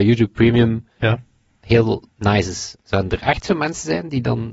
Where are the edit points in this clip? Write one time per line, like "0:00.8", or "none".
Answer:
none